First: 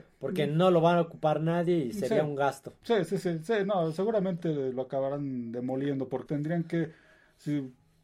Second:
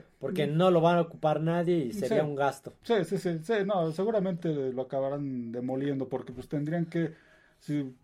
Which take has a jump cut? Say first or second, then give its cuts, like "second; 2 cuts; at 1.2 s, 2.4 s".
first; 1 cut; at 6.3 s